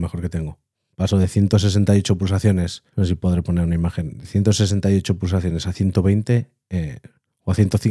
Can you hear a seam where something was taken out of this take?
yes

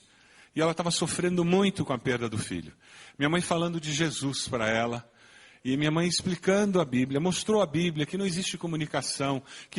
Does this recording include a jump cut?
no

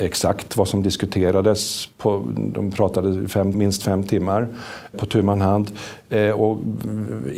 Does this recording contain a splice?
yes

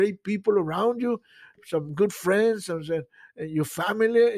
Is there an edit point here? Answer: no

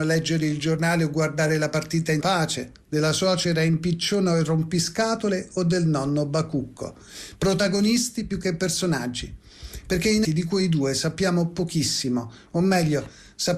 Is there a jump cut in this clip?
yes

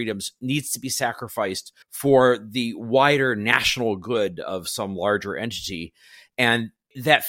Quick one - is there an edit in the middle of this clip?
yes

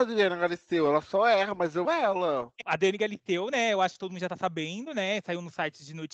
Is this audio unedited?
no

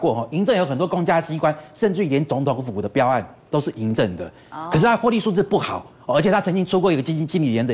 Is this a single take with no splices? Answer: yes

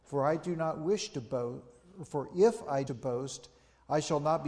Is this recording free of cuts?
no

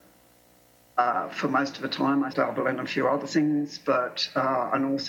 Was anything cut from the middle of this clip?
yes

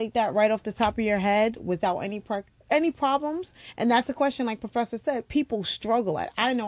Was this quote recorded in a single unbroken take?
no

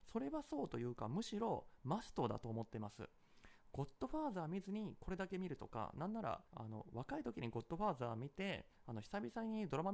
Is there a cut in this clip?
yes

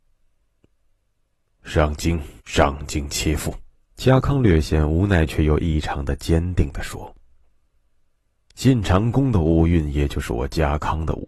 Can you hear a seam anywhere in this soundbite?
yes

